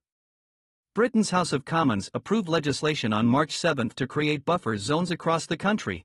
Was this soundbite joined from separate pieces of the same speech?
no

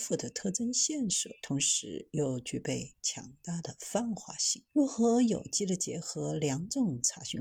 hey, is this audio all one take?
no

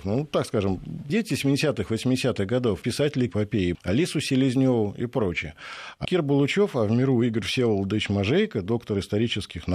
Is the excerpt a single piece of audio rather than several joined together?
no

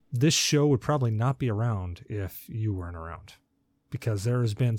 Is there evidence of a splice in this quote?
no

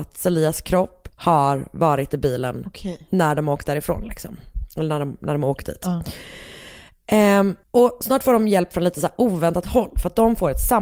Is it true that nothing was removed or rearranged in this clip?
no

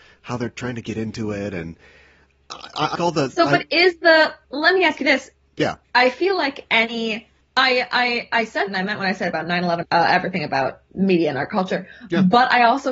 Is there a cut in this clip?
yes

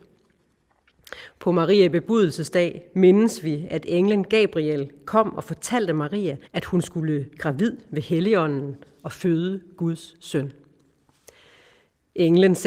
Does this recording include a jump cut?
yes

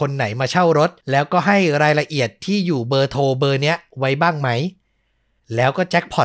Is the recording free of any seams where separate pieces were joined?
no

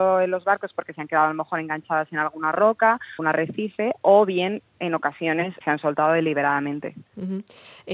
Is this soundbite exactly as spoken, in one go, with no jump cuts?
no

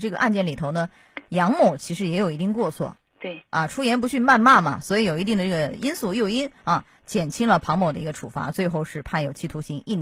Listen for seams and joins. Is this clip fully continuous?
no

